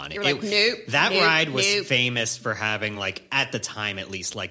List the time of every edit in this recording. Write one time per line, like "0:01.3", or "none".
none